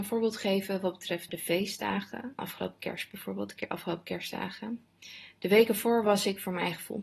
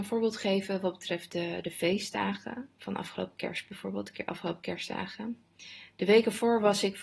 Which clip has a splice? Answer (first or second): first